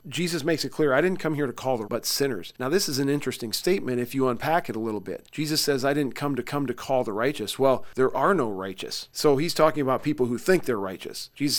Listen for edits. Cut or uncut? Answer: cut